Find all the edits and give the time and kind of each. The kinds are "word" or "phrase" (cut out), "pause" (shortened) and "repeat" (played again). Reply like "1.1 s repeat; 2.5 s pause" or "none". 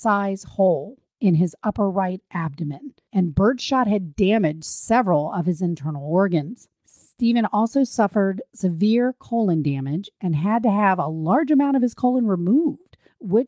none